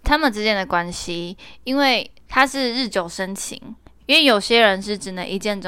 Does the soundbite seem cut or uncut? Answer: cut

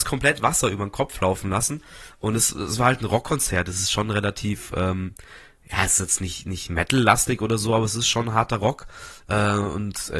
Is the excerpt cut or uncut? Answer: uncut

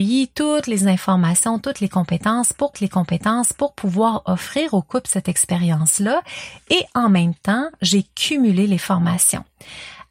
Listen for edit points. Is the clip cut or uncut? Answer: cut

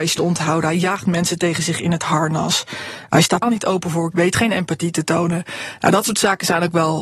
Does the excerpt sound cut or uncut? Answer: cut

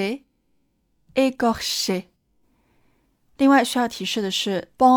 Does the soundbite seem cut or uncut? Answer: uncut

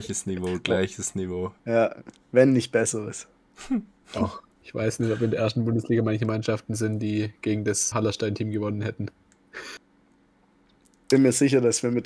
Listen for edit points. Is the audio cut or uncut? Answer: cut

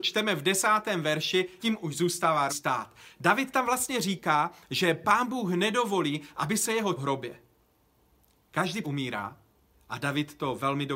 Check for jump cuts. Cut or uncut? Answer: cut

